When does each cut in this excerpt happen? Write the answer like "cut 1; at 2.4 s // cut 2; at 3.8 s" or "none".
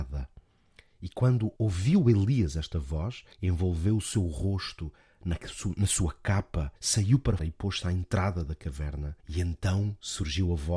cut 1; at 1.6 s // cut 2; at 3.3 s // cut 3; at 6.8 s // cut 4; at 7.4 s // cut 5; at 9.2 s